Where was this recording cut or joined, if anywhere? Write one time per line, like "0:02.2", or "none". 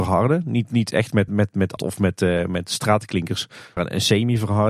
0:01.3
0:01.8
0:03.8